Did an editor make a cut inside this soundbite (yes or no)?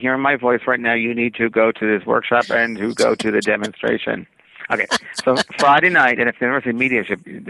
no